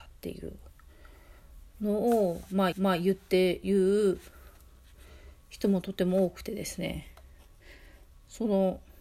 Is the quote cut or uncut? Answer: cut